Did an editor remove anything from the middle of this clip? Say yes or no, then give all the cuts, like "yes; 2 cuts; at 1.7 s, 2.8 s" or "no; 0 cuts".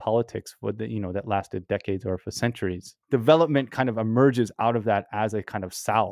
no; 0 cuts